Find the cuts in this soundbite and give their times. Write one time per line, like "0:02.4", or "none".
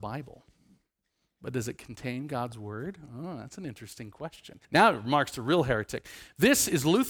0:04.6

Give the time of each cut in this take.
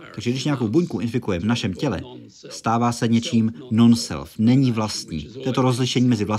0:01.4

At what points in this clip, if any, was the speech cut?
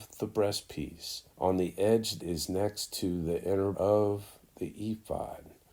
0:01.3
0:02.2
0:03.7

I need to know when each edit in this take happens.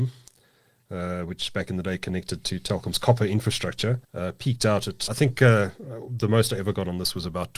0:04.0
0:05.1

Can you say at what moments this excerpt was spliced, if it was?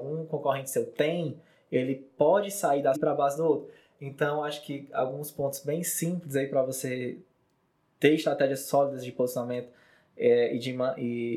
0:02.9

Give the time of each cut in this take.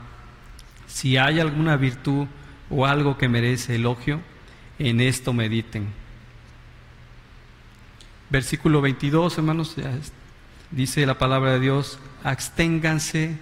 0:10.7

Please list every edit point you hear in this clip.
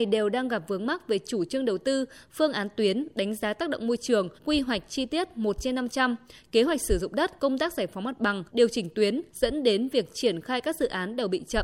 0:04.4
0:07.4
0:08.5
0:09.3

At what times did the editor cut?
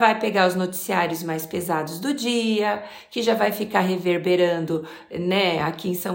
none

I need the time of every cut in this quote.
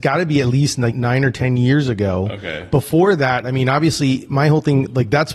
0:00.9

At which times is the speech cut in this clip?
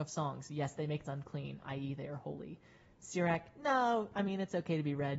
0:01.0

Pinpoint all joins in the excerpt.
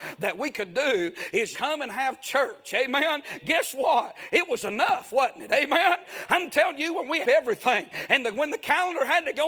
0:01.5
0:07.2

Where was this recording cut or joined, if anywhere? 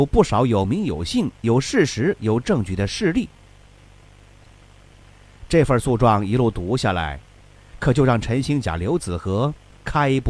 none

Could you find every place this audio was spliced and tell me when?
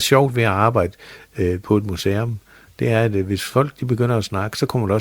none

